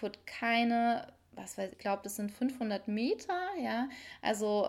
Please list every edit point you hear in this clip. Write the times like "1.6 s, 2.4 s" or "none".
1.7 s

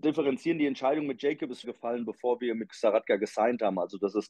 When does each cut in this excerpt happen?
1.6 s, 2.7 s

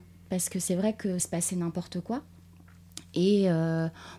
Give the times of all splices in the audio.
1.2 s

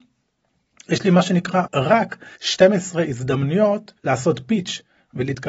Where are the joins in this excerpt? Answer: 1.7 s, 2.4 s, 4.0 s

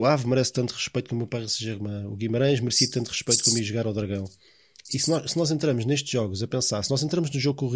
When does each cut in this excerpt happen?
none

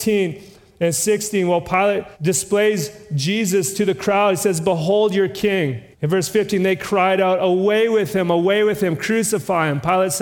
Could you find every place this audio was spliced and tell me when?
2.1 s, 5.9 s

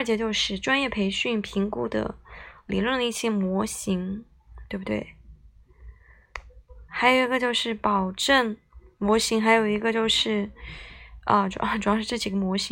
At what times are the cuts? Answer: none

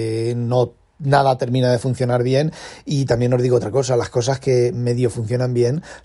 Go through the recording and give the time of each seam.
none

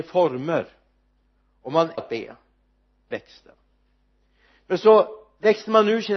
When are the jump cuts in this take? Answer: 2.0 s, 3.1 s

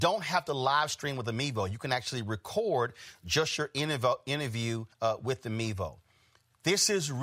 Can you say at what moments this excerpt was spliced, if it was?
4.9 s

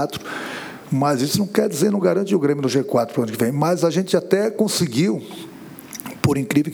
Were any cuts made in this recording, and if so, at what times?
none

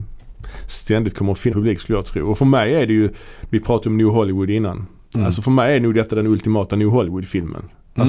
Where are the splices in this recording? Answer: 1.5 s

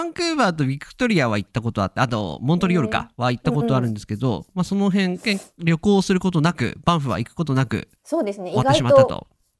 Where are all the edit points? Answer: 8.0 s

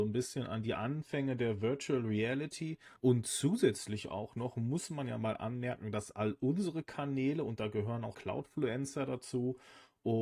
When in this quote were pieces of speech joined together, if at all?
3.0 s, 8.1 s

